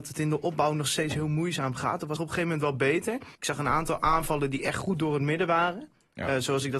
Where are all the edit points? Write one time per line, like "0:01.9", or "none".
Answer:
0:02.2
0:03.3